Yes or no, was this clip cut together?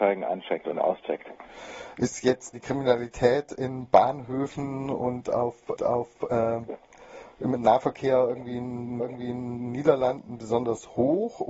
yes